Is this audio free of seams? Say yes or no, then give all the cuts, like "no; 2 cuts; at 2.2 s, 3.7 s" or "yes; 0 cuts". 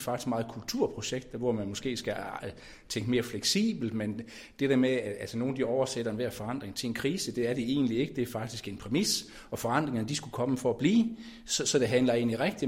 yes; 0 cuts